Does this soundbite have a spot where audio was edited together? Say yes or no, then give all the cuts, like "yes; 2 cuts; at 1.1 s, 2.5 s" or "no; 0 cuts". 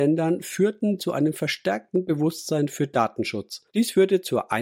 yes; 2 cuts; at 1.0 s, 3.7 s